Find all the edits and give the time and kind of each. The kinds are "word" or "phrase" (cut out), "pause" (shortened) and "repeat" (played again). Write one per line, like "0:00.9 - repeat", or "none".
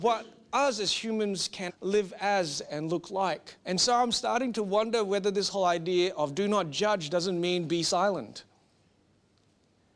0:01.7 - word
0:03.6 - pause